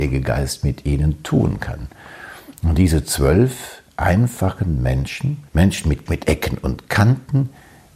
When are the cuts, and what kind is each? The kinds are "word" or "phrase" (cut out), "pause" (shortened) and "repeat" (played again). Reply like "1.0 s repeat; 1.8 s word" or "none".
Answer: 5.5 s pause; 6.1 s phrase